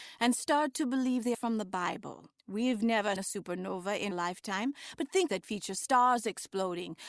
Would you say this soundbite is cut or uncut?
cut